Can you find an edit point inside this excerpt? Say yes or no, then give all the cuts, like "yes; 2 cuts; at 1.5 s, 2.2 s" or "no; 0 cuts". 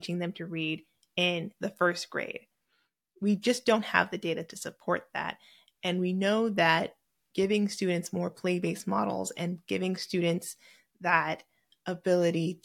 no; 0 cuts